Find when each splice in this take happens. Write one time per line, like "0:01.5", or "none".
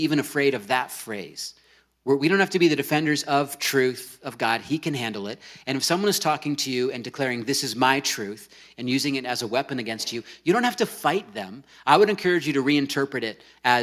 none